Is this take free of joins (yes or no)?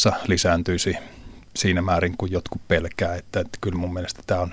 yes